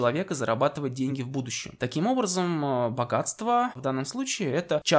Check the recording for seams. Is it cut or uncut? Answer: uncut